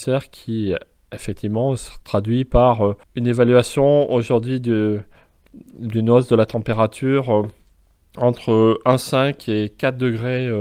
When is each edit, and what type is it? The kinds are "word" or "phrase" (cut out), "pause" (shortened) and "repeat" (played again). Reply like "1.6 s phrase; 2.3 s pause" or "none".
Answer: 3.0 s pause